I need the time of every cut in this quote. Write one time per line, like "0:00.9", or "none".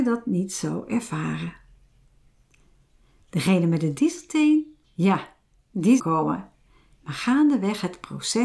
0:04.8
0:06.0

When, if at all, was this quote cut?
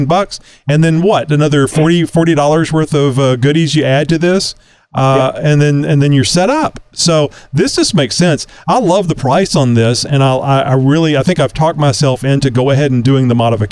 none

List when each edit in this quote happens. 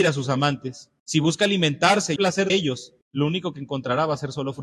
0:01.0
0:02.2
0:02.5
0:03.0

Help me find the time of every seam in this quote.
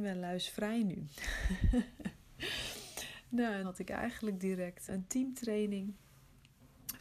0:03.6
0:04.9

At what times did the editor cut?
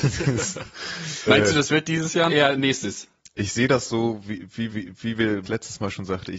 0:01.3
0:02.3
0:04.7
0:05.4

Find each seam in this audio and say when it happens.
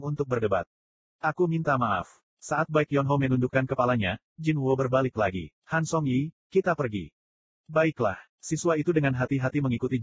0:02.3
0:05.6
0:08.3

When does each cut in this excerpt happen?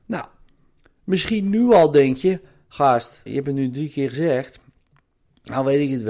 0:03.3

